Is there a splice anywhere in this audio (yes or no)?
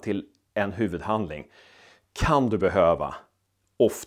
no